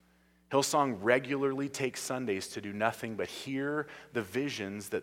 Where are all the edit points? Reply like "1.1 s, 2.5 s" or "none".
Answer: none